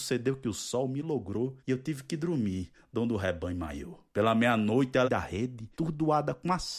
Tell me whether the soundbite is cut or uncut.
cut